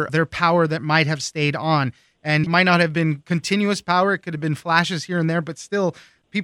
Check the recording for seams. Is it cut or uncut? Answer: cut